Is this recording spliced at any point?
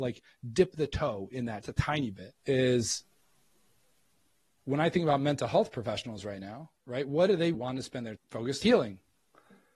yes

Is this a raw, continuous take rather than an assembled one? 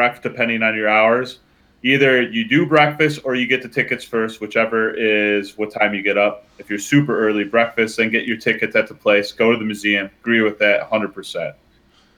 yes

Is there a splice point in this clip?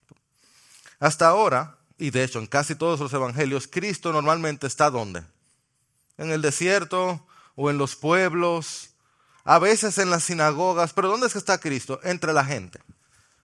no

